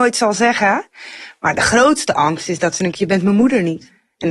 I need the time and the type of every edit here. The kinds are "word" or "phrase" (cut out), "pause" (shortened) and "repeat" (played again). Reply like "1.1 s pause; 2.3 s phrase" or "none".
2.9 s word